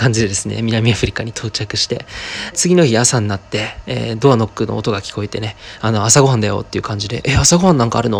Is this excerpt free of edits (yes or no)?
no